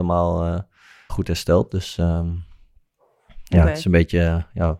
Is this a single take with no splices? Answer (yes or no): no